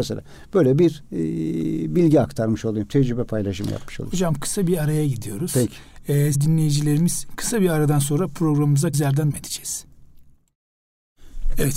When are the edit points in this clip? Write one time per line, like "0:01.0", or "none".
0:06.3
0:08.9
0:09.3